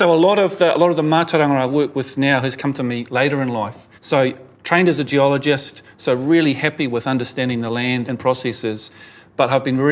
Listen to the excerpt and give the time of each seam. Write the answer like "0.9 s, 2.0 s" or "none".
4.0 s, 8.0 s